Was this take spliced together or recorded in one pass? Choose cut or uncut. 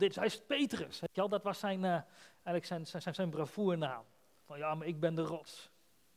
uncut